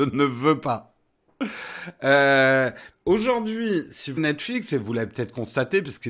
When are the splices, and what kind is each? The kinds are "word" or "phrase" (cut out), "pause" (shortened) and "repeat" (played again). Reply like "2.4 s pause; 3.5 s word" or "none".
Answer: 2.9 s word; 4.2 s word

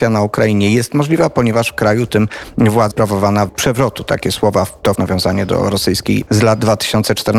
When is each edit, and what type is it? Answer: 2.9 s word; 3.5 s word; 4.9 s word; 6.3 s word

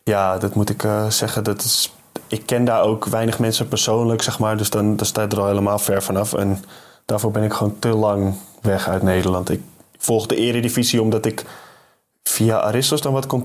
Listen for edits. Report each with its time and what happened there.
none

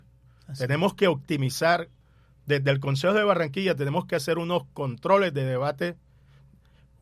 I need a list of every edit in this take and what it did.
none

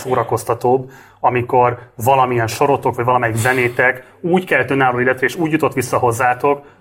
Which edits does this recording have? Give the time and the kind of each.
none

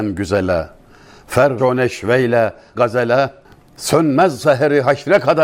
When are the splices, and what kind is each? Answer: 1.6 s word; 2.7 s word

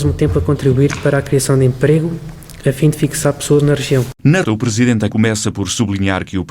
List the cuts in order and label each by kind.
4.4 s word; 5.1 s word

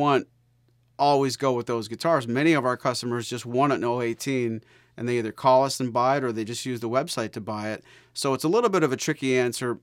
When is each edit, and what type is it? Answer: none

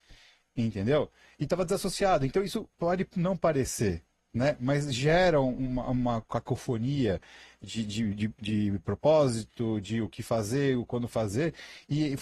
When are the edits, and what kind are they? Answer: 2.7 s pause

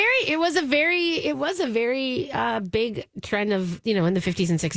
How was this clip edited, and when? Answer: none

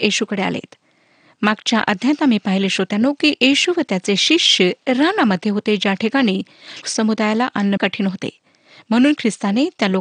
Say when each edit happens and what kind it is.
6.8 s word; 7.8 s word

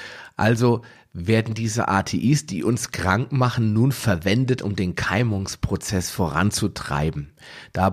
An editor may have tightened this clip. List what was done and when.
none

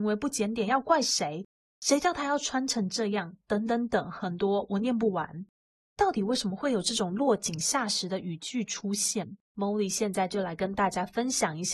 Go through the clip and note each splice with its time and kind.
none

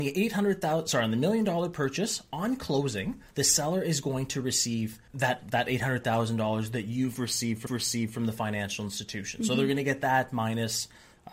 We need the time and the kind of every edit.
3.3 s pause; 5.1 s pause; 7.7 s repeat

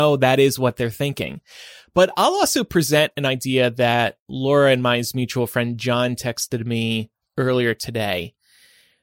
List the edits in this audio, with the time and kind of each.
none

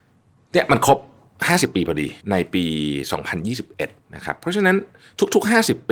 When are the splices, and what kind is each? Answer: 2.2 s pause; 4.0 s pause

